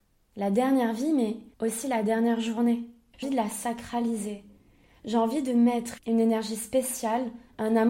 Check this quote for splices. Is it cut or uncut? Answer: cut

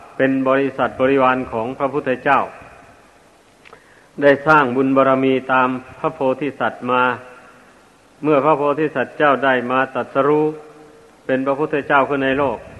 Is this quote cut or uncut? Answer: uncut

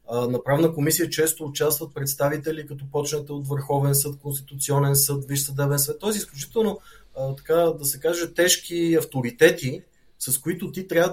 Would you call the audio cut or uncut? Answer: uncut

